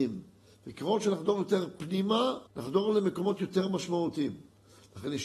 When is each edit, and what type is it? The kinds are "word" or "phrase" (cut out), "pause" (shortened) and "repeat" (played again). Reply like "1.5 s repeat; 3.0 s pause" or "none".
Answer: 2.5 s pause